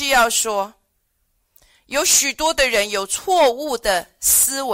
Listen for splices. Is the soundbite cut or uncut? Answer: uncut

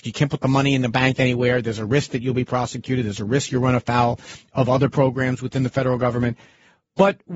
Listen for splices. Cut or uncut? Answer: uncut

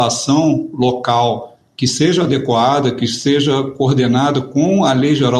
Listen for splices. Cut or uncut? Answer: uncut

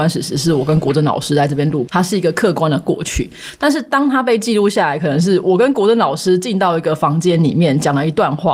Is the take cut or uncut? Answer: cut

